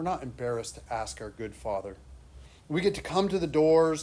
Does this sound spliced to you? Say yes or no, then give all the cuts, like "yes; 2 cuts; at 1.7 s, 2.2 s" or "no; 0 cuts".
no; 0 cuts